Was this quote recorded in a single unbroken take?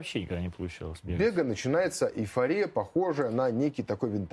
yes; 0 cuts

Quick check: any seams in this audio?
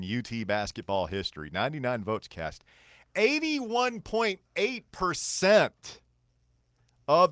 no; 0 cuts

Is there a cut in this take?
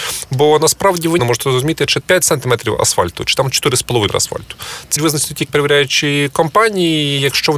yes; 5 cuts; at 1.2 s, 2.0 s, 4.1 s, 5.0 s, 5.5 s

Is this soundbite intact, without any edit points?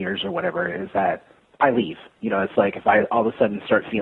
yes; 0 cuts

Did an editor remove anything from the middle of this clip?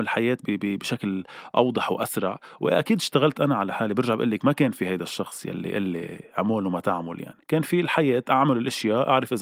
yes; 1 cut; at 7.4 s

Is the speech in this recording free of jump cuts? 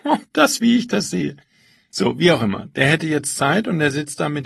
yes; 0 cuts

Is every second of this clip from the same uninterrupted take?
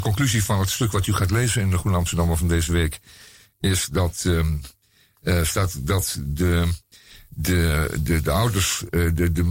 yes; 0 cuts

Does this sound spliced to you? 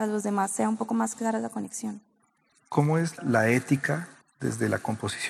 no; 0 cuts

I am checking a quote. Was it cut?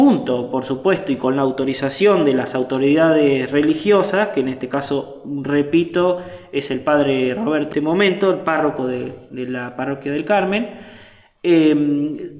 yes; 1 cut; at 7.7 s

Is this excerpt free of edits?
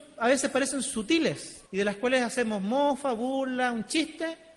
no; 1 cut; at 1.7 s

